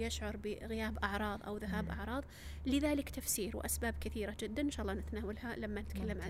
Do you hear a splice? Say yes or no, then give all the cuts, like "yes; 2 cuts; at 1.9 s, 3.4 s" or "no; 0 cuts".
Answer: no; 0 cuts